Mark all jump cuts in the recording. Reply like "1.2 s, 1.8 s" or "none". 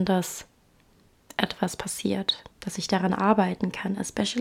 2.5 s